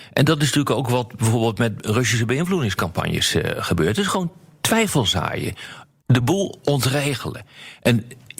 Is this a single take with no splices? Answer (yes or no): yes